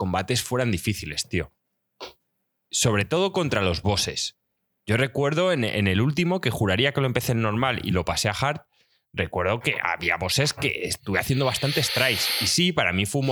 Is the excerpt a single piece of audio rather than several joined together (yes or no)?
yes